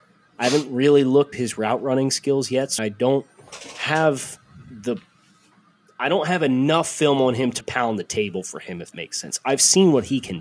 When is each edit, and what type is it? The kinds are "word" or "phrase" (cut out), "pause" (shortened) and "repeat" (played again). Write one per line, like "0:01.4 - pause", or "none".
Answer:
0:01.3 - word
0:02.8 - word
0:07.6 - word
0:08.9 - word